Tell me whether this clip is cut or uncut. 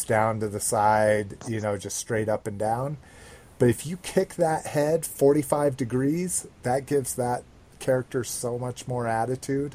uncut